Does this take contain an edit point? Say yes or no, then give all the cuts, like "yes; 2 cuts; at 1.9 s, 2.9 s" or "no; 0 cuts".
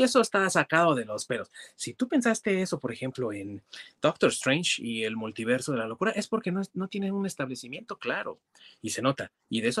no; 0 cuts